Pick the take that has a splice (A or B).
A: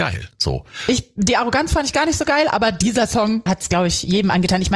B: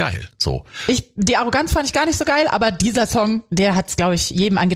A